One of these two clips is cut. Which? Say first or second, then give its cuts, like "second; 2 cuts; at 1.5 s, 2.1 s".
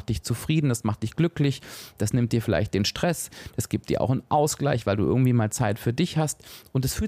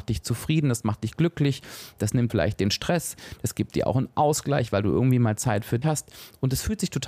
second; 2 cuts; at 2.3 s, 5.8 s